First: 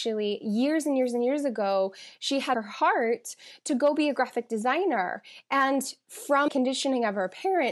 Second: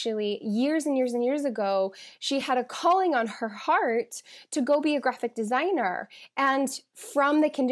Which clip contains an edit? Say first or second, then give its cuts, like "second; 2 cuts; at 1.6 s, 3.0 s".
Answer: first; 2 cuts; at 2.5 s, 6.5 s